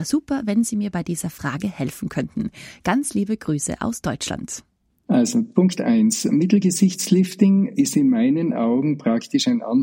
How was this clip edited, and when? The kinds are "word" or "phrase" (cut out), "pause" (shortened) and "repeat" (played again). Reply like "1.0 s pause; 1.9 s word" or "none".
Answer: none